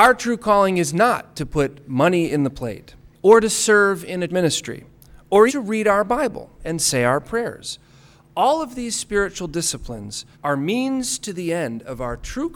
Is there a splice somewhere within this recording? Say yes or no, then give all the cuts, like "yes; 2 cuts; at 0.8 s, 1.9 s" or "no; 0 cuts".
yes; 4 cuts; at 3.1 s, 4.3 s, 5.5 s, 10.3 s